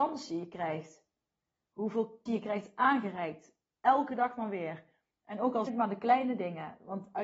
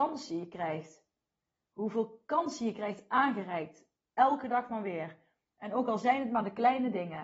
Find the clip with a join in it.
first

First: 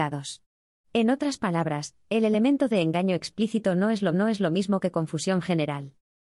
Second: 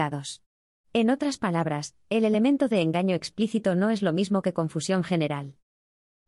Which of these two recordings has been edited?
first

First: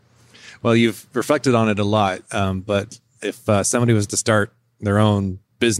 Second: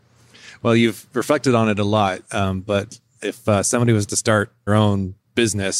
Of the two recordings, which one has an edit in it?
second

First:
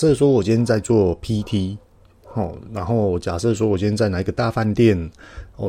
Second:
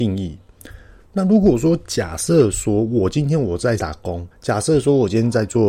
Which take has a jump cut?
second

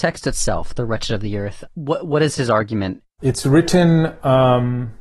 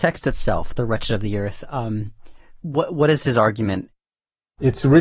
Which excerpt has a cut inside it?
first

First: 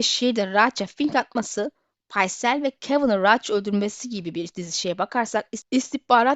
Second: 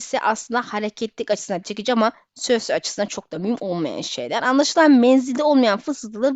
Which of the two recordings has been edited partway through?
second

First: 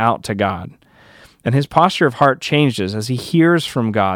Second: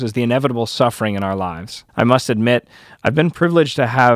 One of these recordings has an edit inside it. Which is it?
second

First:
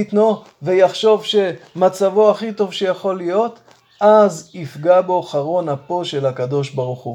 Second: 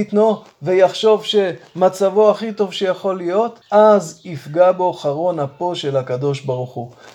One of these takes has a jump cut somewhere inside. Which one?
second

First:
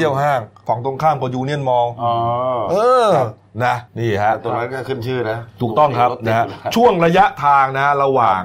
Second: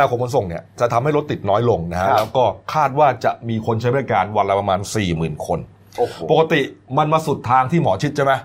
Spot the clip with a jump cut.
first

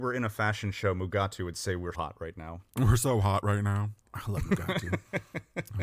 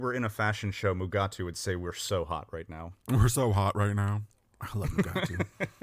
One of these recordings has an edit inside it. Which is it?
first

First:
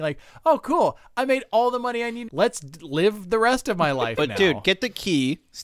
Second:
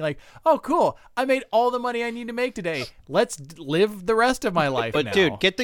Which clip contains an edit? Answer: first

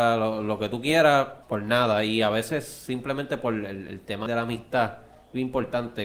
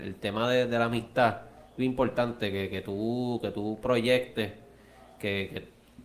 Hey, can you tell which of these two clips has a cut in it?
first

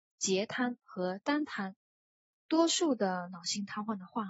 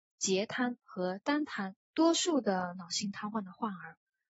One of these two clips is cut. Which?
second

